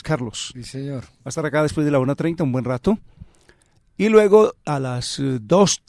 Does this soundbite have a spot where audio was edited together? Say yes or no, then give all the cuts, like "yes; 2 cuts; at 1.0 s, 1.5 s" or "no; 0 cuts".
no; 0 cuts